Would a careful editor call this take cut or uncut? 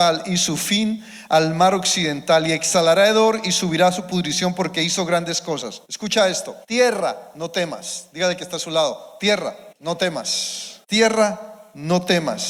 cut